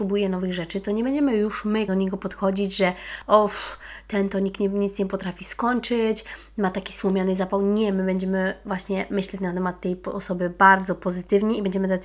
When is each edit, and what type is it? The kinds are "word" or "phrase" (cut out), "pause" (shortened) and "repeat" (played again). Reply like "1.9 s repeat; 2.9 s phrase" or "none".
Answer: 1.9 s word